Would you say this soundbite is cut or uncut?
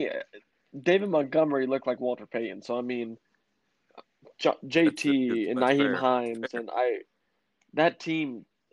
uncut